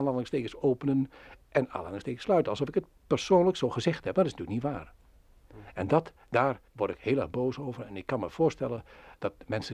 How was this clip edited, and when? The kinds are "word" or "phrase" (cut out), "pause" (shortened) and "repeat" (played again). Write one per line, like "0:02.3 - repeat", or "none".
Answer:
0:06.7 - pause